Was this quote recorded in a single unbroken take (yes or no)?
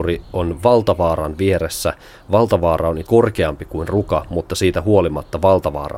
no